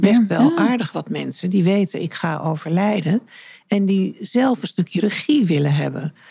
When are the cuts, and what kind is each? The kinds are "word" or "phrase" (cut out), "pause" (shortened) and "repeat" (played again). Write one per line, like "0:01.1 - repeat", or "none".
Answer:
none